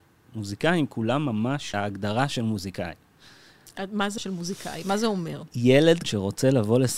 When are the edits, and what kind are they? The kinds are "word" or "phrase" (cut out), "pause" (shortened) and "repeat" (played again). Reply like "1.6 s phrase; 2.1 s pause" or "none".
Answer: 1.7 s word; 4.2 s word; 6.0 s word